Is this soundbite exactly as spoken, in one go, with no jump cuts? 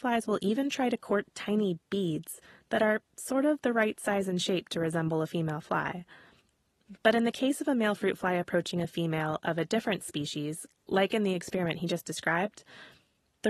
yes; 0 cuts

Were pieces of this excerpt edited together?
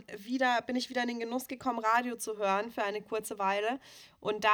no; 0 cuts

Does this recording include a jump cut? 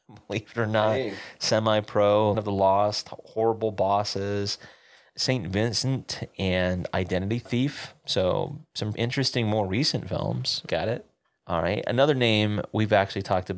yes; 3 cuts; at 2.3 s, 8.9 s, 10.7 s

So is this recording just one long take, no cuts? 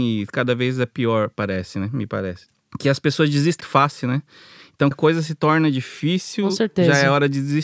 no; 2 cuts; at 3.6 s, 4.9 s

